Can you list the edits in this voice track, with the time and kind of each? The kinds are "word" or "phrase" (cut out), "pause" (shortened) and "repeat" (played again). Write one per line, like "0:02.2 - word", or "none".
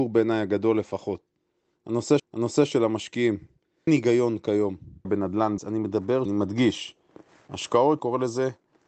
0:02.2 - repeat
0:03.9 - word
0:05.0 - word
0:05.6 - word
0:06.2 - phrase
0:08.0 - word